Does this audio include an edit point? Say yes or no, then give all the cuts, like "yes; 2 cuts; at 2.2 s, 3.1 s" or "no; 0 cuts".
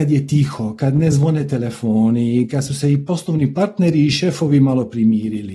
no; 0 cuts